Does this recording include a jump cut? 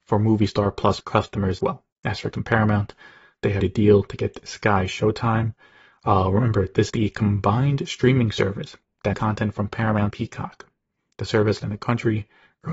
yes; 8 cuts; at 1.0 s, 1.6 s, 2.3 s, 3.6 s, 6.9 s, 9.1 s, 10.1 s, 11.6 s

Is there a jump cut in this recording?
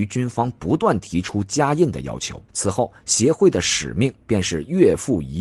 yes; 1 cut; at 2.5 s

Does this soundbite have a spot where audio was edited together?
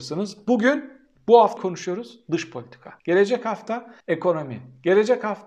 yes; 3 cuts; at 1.6 s, 3.0 s, 4.0 s

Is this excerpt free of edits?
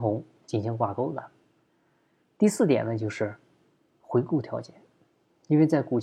yes; 0 cuts

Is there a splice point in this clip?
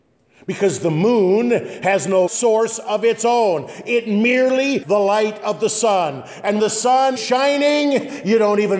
yes; 4 cuts; at 2.3 s, 4.8 s, 6.6 s, 7.2 s

